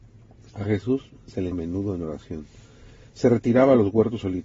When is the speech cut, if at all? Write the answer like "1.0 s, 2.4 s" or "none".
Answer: 1.5 s